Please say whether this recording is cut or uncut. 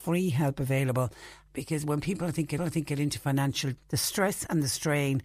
cut